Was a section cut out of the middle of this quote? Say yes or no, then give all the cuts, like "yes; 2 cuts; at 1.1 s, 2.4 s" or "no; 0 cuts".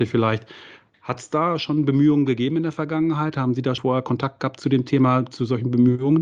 yes; 1 cut; at 3.8 s